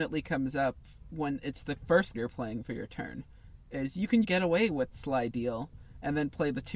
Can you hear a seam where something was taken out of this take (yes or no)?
yes